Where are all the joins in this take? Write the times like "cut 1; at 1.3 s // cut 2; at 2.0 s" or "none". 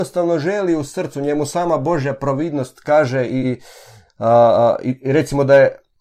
cut 1; at 3.4 s